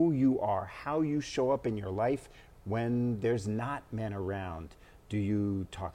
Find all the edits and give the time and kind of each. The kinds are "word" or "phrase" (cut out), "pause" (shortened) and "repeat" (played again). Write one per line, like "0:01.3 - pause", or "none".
none